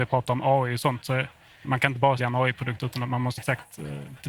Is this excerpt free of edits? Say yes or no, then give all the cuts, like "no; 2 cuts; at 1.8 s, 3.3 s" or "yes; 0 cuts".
no; 3 cuts; at 1.6 s, 2.2 s, 3.4 s